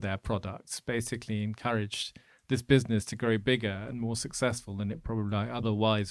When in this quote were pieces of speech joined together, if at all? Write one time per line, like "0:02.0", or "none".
none